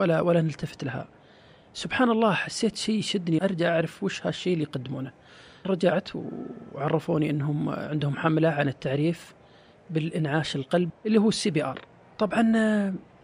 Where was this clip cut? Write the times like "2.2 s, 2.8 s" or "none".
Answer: 3.4 s, 5.6 s, 10.9 s